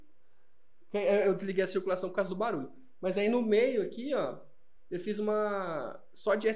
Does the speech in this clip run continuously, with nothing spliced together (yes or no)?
yes